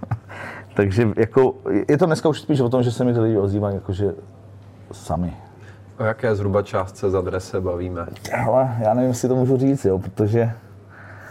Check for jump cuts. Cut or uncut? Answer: uncut